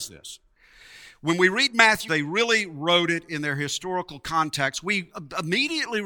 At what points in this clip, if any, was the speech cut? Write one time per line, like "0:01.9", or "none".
0:02.1